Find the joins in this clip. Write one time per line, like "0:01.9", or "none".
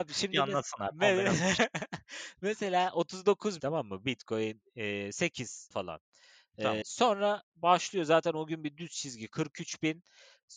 0:03.6
0:05.7
0:06.8